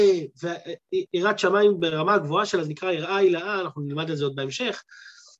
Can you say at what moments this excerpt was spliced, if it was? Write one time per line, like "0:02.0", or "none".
none